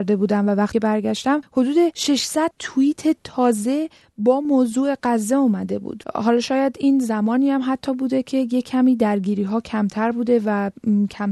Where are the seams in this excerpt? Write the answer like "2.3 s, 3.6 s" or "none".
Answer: none